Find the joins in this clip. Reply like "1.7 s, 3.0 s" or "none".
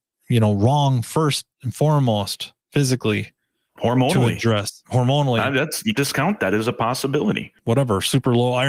1.5 s, 2.6 s, 4.8 s, 5.9 s, 6.4 s, 7.6 s